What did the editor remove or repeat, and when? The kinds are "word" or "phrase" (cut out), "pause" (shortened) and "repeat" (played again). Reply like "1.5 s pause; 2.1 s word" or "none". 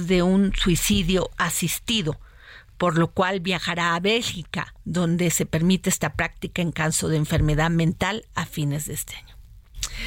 none